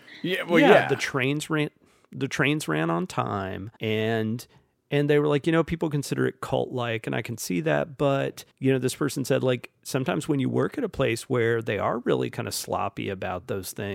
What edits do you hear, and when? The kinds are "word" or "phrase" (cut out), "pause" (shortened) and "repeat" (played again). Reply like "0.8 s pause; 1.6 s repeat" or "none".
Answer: 3.8 s pause; 8.5 s pause